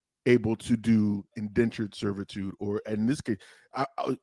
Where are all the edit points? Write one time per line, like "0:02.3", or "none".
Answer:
none